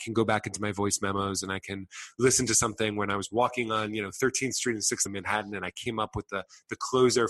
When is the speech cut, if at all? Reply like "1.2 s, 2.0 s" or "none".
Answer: 5.1 s